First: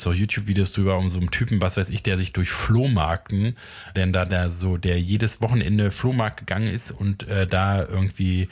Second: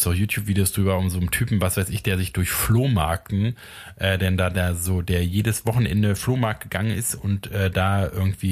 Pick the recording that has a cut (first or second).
first